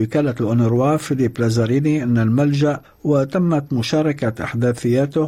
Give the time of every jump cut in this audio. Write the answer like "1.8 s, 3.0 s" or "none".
2.8 s